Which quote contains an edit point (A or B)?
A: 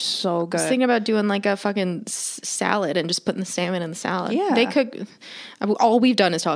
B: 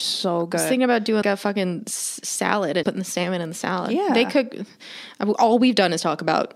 B